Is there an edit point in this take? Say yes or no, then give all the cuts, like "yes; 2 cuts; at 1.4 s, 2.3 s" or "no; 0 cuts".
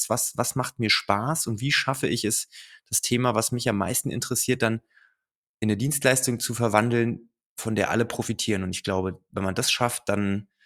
no; 0 cuts